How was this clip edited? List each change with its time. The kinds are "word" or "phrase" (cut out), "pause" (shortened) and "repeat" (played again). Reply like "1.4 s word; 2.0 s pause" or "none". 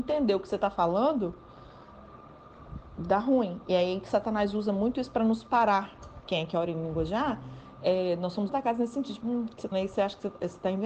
8.5 s word; 9.2 s word; 9.7 s word